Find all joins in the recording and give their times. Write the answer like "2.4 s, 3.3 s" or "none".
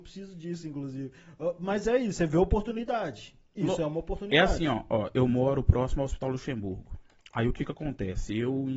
none